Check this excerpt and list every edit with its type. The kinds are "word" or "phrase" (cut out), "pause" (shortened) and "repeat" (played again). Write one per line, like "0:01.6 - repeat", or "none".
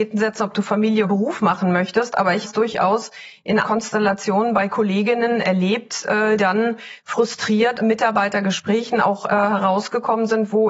0:01.0 - word
0:02.4 - word
0:03.6 - word
0:06.4 - word
0:07.8 - word